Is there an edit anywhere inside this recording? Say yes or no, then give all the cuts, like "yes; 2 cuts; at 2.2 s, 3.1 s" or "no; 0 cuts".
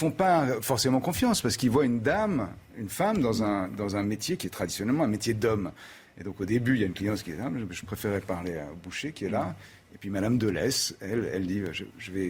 no; 0 cuts